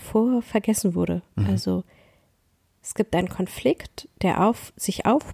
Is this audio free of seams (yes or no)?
yes